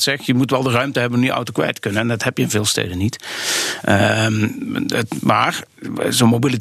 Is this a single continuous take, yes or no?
yes